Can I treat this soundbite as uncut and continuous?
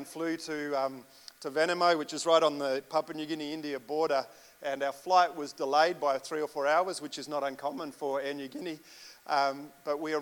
yes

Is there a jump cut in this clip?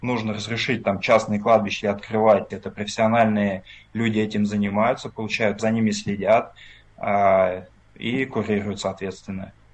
yes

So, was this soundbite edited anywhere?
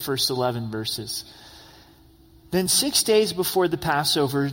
no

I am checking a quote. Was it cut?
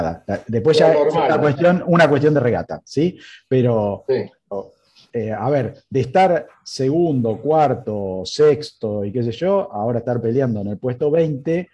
no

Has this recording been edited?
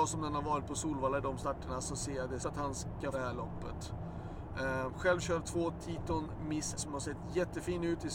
yes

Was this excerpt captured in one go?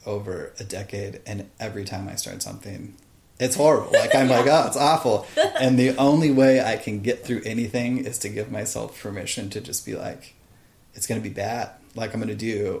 yes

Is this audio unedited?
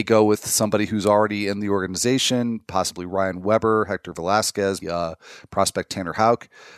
no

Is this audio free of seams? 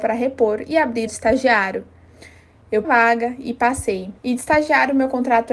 no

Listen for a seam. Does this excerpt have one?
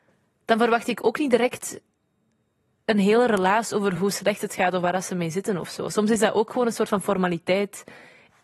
no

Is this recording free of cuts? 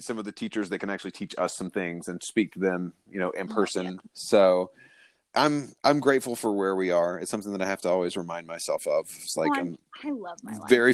yes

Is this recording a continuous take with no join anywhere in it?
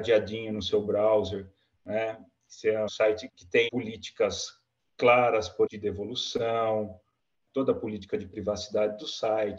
no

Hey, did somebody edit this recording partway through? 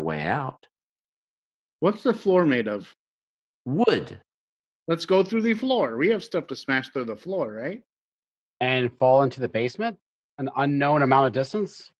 no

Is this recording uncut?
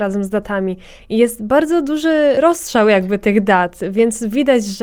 yes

